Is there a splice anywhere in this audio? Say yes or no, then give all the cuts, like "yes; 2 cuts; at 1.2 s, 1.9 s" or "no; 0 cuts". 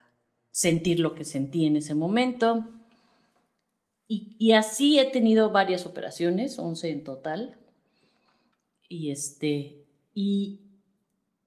no; 0 cuts